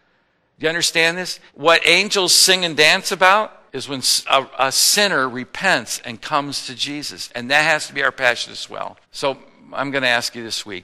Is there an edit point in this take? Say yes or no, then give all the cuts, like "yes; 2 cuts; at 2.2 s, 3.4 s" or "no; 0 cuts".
yes; 3 cuts; at 1.5 s, 3.7 s, 9.0 s